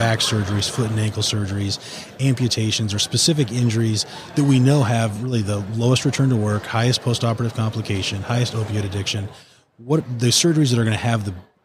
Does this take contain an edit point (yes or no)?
no